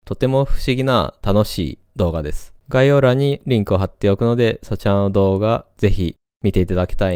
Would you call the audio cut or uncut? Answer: cut